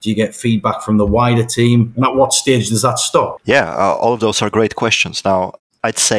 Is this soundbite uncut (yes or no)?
yes